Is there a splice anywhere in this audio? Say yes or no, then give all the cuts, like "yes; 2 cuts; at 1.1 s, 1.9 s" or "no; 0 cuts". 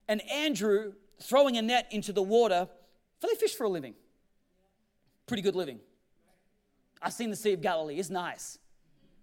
no; 0 cuts